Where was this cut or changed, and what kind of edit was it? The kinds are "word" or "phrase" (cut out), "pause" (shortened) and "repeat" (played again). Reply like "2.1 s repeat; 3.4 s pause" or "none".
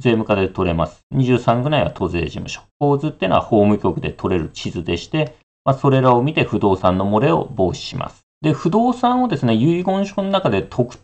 8.3 s pause